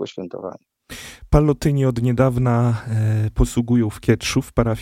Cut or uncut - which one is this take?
uncut